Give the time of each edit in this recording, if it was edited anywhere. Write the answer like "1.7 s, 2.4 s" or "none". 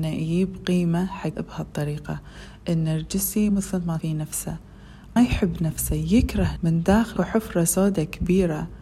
1.3 s, 3.5 s, 4.0 s, 5.2 s, 6.6 s, 7.2 s